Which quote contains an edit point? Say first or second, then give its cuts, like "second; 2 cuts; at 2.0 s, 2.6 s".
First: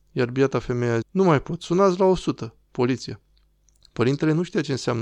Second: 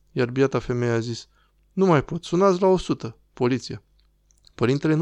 first; 1 cut; at 1.0 s